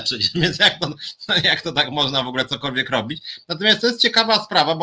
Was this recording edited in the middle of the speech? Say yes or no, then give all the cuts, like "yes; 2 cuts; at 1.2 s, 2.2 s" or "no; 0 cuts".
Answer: no; 0 cuts